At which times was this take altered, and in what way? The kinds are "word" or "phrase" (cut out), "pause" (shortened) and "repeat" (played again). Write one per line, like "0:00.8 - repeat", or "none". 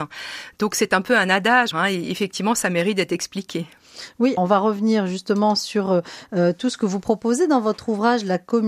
0:01.7 - phrase
0:04.4 - word